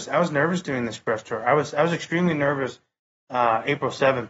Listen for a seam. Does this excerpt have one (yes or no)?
no